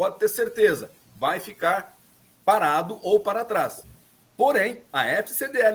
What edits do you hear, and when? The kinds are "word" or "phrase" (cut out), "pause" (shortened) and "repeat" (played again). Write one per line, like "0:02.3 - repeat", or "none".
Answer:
none